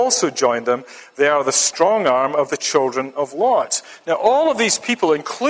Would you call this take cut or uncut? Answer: uncut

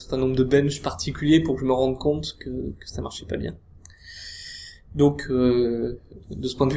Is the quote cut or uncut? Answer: uncut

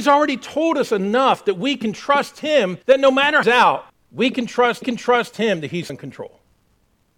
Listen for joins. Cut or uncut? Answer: cut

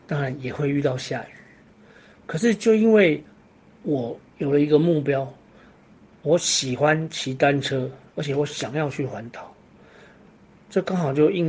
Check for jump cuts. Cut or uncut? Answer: uncut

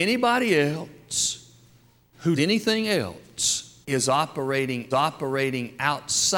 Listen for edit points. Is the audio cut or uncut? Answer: cut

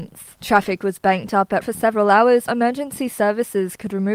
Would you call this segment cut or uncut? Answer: cut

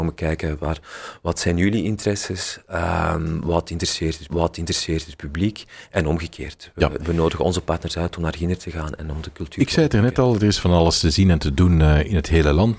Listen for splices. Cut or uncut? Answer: cut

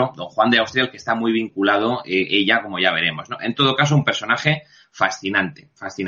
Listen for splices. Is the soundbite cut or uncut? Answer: uncut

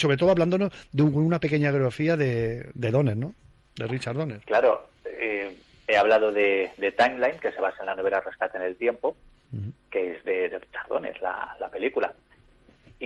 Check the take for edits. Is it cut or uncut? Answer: uncut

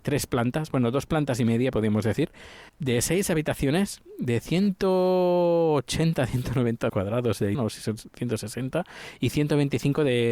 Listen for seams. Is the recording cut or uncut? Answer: cut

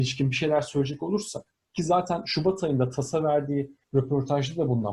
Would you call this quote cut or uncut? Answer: cut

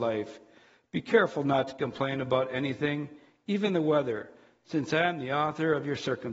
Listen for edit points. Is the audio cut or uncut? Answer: uncut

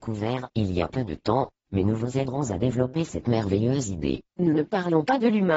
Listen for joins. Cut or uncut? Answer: cut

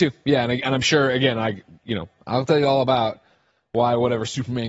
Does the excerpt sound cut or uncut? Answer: uncut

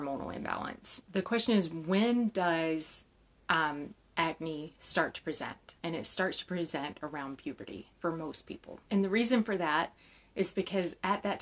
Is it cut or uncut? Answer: cut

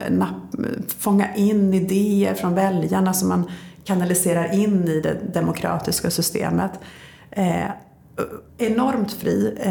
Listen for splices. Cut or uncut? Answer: cut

